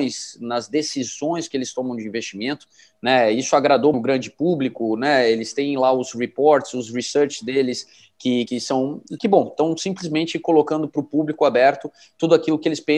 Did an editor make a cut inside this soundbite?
yes; 3 cuts; at 3.9 s, 8.5 s, 9.2 s

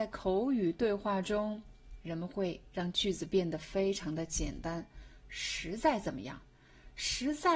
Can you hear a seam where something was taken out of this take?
no; 0 cuts

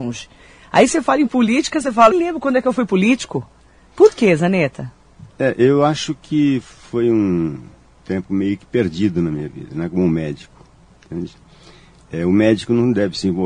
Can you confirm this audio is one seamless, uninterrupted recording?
no; 2 cuts; at 2.1 s, 8.0 s

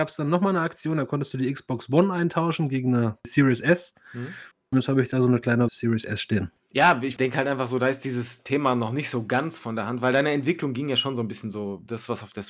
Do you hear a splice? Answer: yes; 1 cut; at 5.7 s

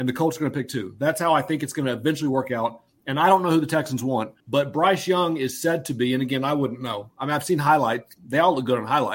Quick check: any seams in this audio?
yes; 1 cut; at 4.4 s

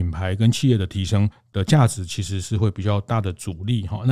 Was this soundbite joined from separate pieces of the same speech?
no; 0 cuts

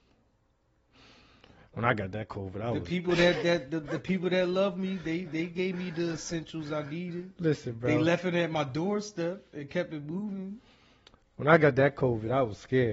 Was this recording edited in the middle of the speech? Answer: no; 0 cuts

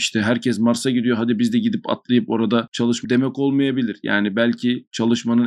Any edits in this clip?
yes; 1 cut; at 3.0 s

